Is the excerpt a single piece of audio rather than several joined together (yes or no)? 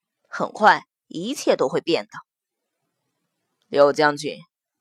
yes